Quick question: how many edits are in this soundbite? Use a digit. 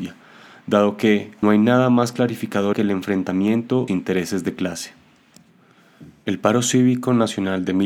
3